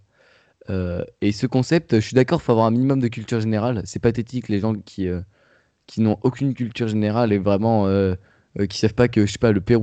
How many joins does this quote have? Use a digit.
0